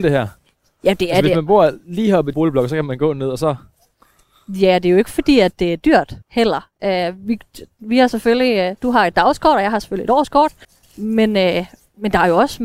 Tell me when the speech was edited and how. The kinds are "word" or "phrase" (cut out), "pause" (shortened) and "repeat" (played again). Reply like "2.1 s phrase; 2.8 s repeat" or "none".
2.3 s phrase; 6.2 s pause; 10.6 s pause